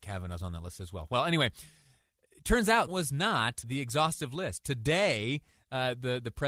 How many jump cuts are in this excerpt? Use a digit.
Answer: 2